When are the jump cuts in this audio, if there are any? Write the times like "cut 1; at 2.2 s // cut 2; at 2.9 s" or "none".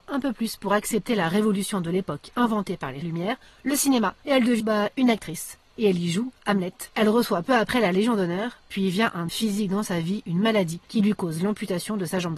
cut 1; at 3.0 s // cut 2; at 4.2 s // cut 3; at 4.6 s // cut 4; at 6.9 s // cut 5; at 9.3 s